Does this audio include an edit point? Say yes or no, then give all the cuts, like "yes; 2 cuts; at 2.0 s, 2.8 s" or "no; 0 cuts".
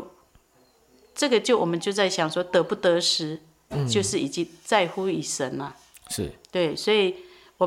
no; 0 cuts